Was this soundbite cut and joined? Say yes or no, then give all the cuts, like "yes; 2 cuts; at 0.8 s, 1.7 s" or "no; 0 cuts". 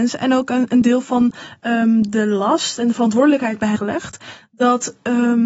yes; 1 cut; at 3.8 s